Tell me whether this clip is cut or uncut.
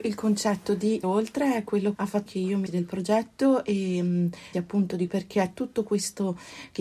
cut